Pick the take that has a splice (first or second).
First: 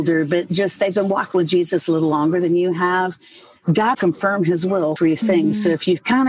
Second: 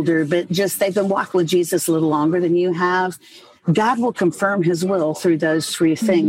first